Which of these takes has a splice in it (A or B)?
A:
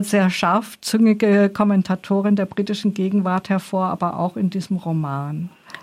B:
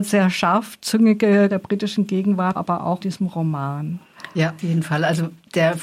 B